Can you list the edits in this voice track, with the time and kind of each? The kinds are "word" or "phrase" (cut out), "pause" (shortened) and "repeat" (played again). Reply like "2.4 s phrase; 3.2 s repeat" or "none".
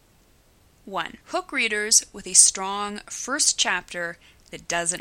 1.2 s pause